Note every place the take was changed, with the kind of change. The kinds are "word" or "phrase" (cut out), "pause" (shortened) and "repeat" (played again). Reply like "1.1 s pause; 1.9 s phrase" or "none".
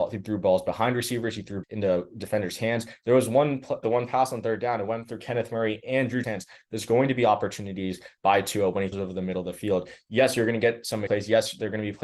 1.6 s word; 3.8 s word; 6.2 s word; 8.9 s word; 11.1 s word